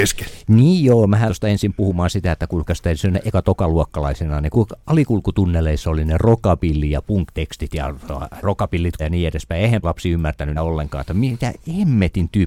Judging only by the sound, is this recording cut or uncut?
cut